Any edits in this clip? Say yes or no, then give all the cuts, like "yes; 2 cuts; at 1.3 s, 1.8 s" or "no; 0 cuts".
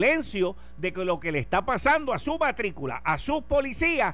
no; 0 cuts